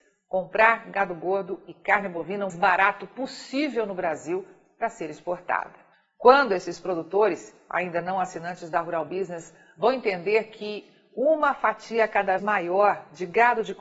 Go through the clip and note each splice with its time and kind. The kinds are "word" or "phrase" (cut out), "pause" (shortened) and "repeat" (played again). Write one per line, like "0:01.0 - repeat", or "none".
0:02.5 - word
0:05.9 - pause
0:12.4 - word